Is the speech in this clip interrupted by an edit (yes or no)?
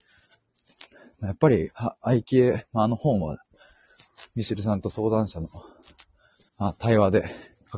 yes